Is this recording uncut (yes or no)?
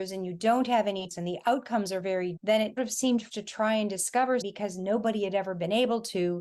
no